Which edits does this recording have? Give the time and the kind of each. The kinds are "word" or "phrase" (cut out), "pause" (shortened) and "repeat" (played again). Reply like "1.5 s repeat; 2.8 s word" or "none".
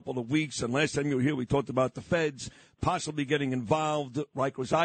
none